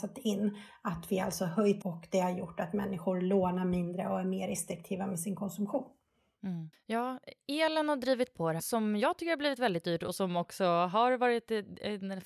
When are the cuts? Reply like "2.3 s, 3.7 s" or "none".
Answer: 1.8 s, 6.7 s, 8.6 s